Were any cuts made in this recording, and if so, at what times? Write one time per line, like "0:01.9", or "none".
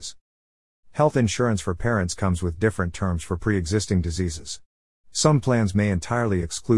none